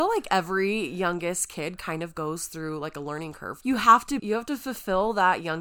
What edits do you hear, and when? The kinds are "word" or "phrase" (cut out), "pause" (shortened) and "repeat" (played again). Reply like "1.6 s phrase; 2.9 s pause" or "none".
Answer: 3.6 s word; 4.2 s word